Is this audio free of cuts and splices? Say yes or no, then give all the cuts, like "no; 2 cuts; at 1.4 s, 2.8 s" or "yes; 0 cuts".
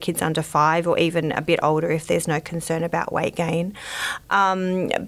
yes; 0 cuts